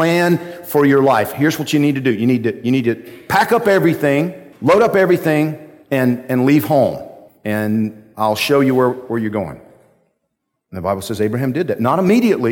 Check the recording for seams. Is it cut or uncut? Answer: uncut